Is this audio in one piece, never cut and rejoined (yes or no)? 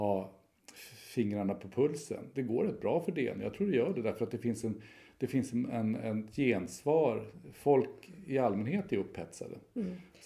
yes